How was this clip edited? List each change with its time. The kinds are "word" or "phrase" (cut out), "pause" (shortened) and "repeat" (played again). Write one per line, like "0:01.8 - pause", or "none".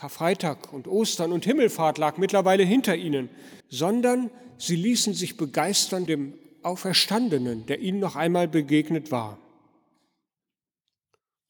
0:03.6 - pause
0:06.1 - word